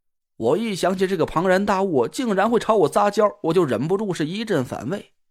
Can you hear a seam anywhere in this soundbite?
no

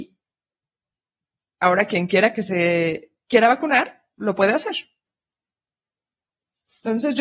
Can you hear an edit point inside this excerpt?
no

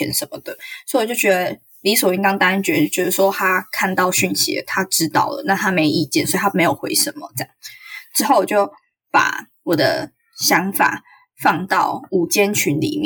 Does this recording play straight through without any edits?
yes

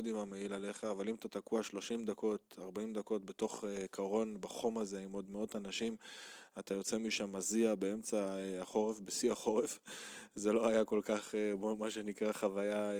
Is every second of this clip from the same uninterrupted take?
yes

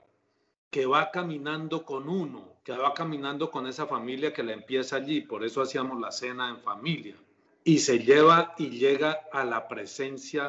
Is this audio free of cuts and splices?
no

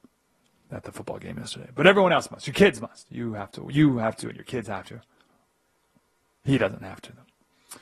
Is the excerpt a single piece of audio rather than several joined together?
yes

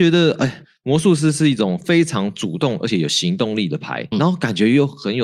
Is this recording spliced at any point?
yes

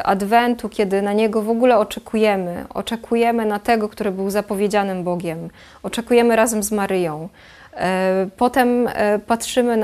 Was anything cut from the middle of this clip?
no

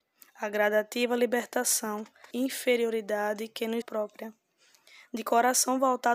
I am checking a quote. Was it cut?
yes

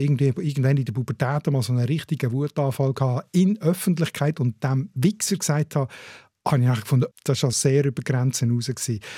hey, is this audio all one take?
no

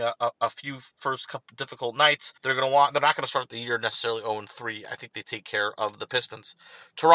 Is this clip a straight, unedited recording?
no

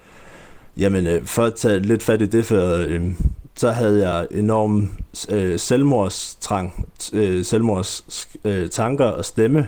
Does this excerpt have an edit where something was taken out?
no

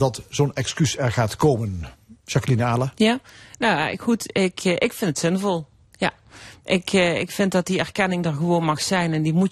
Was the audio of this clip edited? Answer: no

